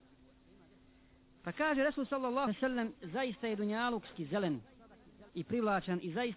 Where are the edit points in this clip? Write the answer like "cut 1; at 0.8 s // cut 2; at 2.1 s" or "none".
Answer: cut 1; at 2.5 s // cut 2; at 2.9 s // cut 3; at 4.1 s // cut 4; at 5.3 s